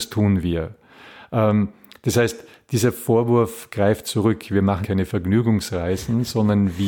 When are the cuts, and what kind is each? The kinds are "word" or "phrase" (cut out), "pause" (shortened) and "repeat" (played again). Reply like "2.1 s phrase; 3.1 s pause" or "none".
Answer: 4.8 s word